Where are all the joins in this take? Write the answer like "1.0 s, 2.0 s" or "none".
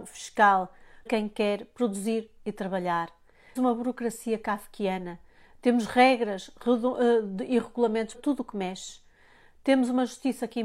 1.1 s, 3.6 s, 8.1 s